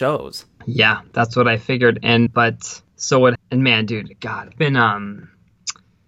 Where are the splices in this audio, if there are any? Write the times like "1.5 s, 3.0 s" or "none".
2.3 s, 2.9 s, 3.3 s, 4.6 s